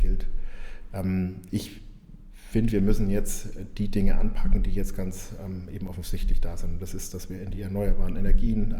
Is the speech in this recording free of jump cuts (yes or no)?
yes